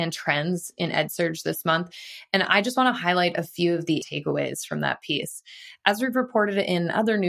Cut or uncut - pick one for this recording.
cut